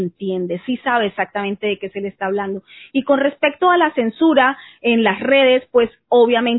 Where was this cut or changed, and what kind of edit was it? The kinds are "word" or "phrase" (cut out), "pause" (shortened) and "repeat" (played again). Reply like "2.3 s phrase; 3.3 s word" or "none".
none